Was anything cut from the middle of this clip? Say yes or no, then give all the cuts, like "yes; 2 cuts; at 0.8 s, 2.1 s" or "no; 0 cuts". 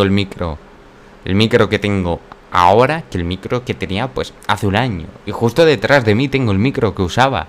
no; 0 cuts